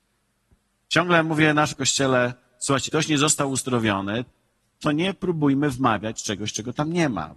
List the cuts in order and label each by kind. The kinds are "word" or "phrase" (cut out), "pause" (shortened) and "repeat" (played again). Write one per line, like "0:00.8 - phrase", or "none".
0:01.7 - word
0:02.9 - word